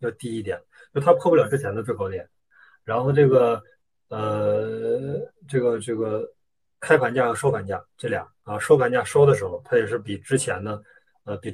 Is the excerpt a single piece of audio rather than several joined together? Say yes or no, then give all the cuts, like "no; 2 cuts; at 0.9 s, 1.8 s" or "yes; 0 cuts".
yes; 0 cuts